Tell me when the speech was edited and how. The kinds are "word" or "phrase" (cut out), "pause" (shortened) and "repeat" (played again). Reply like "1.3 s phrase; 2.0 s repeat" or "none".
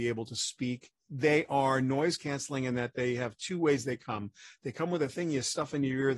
1.0 s pause